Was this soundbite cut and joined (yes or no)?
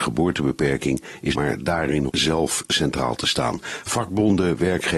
yes